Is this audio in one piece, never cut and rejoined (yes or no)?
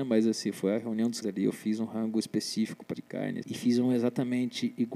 no